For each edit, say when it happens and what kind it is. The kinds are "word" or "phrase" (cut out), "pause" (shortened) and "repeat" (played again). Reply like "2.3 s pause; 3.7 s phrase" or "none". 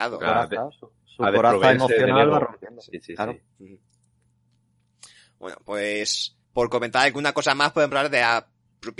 3.5 s pause; 6.4 s pause